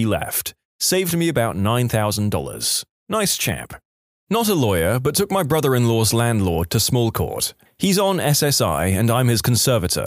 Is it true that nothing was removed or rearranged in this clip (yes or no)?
no